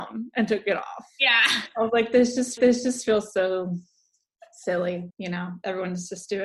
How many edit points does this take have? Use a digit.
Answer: 2